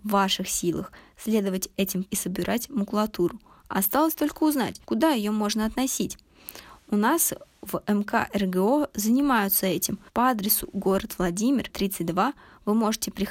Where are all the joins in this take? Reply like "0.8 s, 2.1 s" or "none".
2.1 s, 4.8 s, 10.1 s, 11.7 s